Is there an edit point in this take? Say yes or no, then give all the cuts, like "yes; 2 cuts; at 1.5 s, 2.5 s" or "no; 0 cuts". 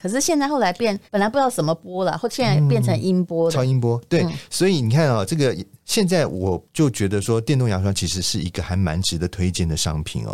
yes; 2 cuts; at 1.1 s, 6.7 s